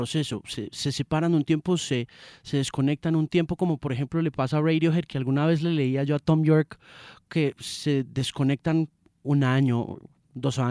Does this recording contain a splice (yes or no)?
no